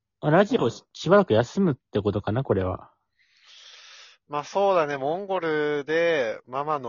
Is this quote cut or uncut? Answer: uncut